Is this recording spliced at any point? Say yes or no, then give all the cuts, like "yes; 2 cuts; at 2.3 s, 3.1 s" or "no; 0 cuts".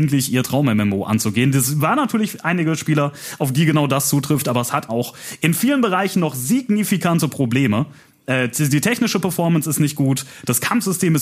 yes; 1 cut; at 4.9 s